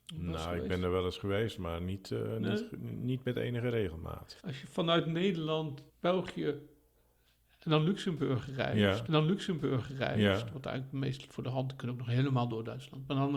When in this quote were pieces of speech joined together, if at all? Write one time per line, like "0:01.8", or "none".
0:04.4
0:05.9
0:09.1